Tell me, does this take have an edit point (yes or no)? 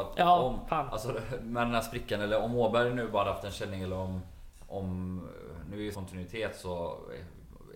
yes